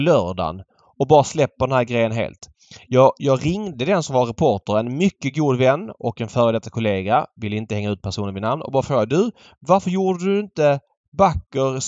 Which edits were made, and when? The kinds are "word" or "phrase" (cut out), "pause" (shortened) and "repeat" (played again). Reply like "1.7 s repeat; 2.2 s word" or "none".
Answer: none